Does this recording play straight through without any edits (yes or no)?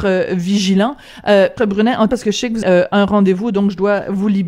no